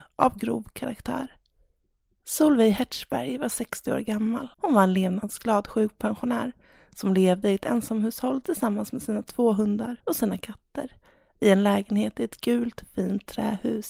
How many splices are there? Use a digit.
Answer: 2